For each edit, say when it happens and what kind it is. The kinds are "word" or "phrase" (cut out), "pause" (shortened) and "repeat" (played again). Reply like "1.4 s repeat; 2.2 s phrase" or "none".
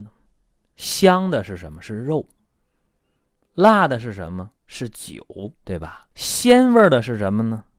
4.6 s pause; 5.5 s pause; 6.1 s pause